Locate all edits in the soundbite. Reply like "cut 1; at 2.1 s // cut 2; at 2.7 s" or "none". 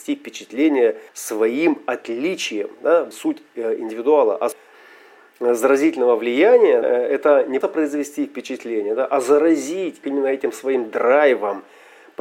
cut 1; at 1.1 s // cut 2; at 3.1 s // cut 3; at 4.5 s // cut 4; at 6.8 s // cut 5; at 7.6 s // cut 6; at 10.0 s